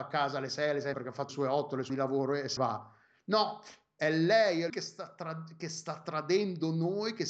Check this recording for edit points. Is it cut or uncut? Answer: cut